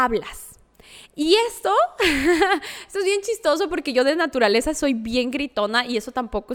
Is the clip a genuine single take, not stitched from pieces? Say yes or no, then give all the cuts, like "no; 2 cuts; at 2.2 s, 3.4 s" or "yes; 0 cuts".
yes; 0 cuts